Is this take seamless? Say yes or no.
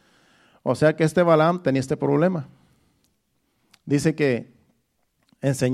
yes